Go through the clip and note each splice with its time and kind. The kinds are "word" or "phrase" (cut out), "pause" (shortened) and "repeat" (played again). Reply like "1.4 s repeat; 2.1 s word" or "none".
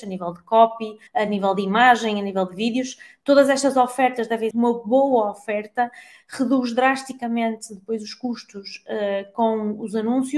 1.1 s pause; 4.5 s phrase